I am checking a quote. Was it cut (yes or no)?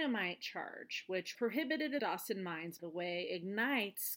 yes